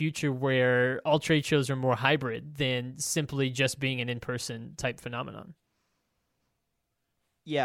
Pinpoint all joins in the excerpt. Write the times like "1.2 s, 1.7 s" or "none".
none